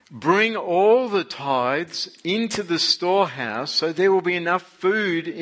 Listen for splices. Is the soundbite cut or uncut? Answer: uncut